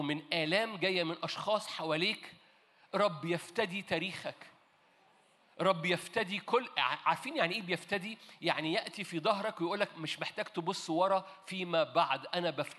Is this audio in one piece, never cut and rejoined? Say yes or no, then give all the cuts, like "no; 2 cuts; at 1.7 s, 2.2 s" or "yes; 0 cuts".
yes; 0 cuts